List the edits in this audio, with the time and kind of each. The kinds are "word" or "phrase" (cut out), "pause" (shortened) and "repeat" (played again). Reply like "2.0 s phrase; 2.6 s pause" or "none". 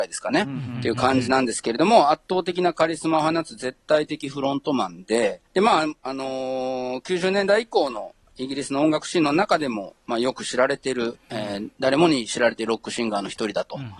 5.5 s pause; 11.2 s pause

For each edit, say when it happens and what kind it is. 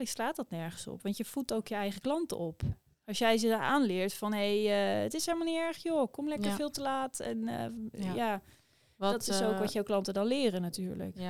none

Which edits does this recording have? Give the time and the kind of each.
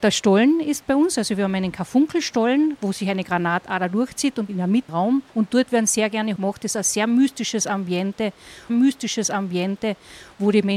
4.5 s phrase; 4.9 s phrase; 5.3 s pause; 6.4 s word; 8.7 s repeat

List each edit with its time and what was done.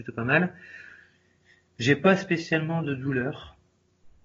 none

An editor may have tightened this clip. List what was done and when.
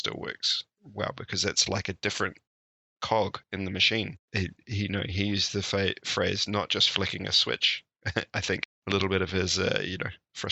3.4 s pause; 4.2 s pause; 8.8 s pause

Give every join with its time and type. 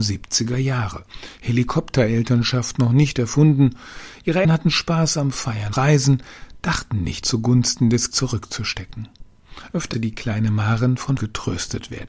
4.4 s word; 5.7 s word; 7.2 s word; 8.1 s word; 9.9 s word; 11.2 s word

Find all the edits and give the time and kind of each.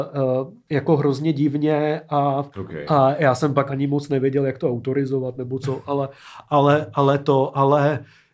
2.5 s pause; 3.7 s word

